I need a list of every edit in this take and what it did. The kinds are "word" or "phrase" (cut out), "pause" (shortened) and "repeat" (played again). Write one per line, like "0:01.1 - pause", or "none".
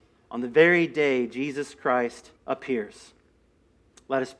0:02.4 - pause